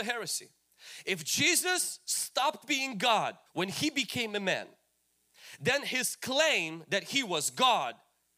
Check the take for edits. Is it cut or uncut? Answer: cut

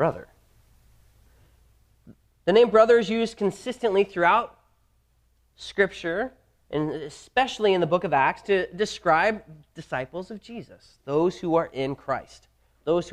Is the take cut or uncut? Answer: uncut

